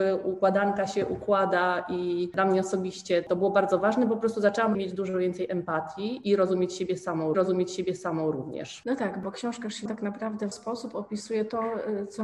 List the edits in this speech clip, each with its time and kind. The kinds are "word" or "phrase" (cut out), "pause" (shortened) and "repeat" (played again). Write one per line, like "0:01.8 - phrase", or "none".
0:04.7 - phrase
0:07.3 - repeat
0:09.9 - word
0:10.5 - word